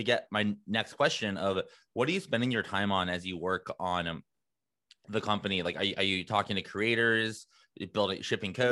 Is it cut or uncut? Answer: uncut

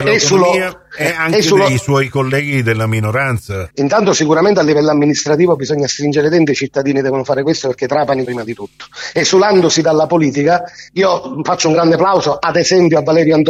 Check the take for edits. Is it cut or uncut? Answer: cut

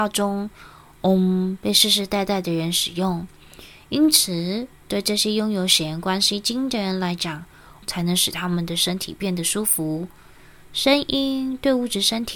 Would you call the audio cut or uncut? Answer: cut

